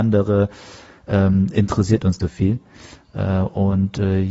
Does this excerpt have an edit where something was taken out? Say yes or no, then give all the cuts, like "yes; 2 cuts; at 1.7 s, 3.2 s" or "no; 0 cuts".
yes; 1 cut; at 2.2 s